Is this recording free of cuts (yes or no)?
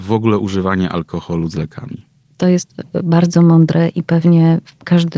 yes